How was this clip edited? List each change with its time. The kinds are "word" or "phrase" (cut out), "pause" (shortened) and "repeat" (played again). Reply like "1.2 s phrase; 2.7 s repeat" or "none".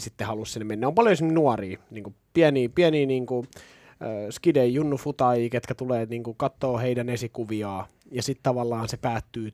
none